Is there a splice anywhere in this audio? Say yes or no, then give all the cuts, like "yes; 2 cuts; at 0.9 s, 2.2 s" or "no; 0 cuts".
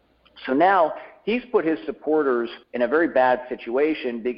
yes; 1 cut; at 2.6 s